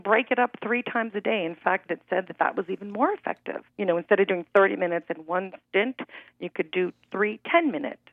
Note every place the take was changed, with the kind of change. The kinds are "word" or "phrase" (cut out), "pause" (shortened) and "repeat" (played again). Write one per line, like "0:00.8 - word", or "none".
0:01.9 - phrase
0:03.7 - pause
0:05.6 - pause